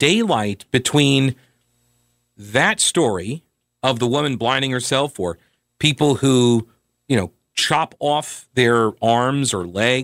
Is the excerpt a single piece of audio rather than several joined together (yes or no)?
yes